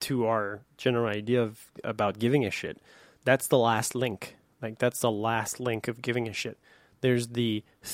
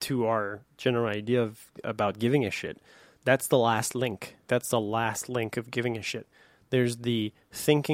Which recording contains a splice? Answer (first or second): second